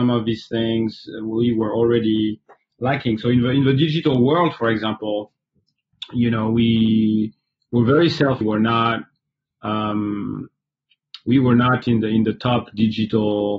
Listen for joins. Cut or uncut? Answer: cut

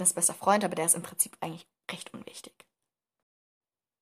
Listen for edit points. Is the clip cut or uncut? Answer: uncut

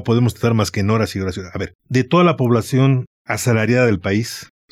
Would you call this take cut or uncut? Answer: cut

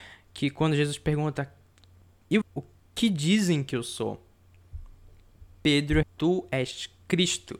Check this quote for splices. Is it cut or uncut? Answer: cut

